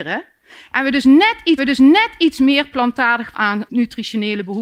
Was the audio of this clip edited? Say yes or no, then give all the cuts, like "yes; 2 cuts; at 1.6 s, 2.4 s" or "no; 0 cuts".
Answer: yes; 3 cuts; at 1.6 s, 3.3 s, 3.7 s